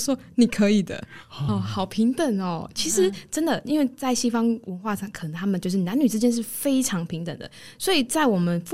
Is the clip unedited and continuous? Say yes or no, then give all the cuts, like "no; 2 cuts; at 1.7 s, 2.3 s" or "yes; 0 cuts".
no; 1 cut; at 1.5 s